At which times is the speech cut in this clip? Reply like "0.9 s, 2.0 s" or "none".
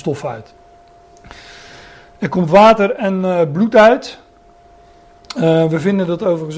none